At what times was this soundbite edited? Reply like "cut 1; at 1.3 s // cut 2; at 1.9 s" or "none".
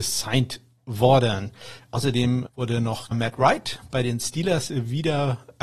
cut 1; at 2.5 s // cut 2; at 3.1 s